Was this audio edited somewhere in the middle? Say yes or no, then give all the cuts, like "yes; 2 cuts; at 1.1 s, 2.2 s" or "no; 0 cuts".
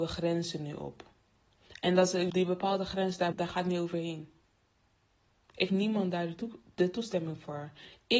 yes; 3 cuts; at 2.3 s, 3.3 s, 5.7 s